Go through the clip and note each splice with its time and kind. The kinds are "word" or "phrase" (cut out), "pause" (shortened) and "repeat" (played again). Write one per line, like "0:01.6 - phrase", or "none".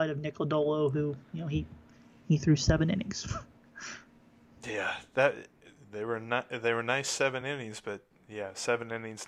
none

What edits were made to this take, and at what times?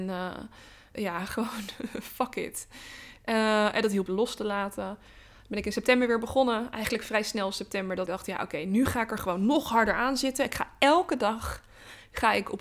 0:00.9 - word
0:04.1 - phrase
0:08.1 - word

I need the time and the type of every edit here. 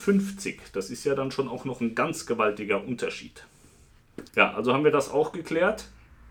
0:04.3 - pause

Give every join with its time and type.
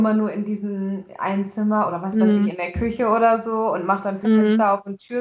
none

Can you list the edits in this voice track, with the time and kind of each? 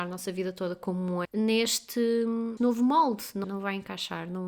0:01.2 - word
0:02.6 - word
0:03.4 - word

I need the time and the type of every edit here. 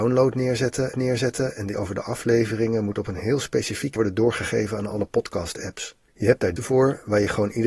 0:00.9 - repeat
0:01.7 - word
0:04.0 - word
0:06.1 - pause
0:06.6 - word

